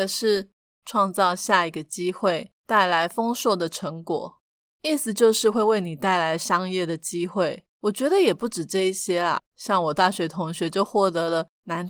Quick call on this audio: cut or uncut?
cut